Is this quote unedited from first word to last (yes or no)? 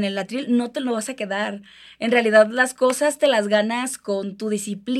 yes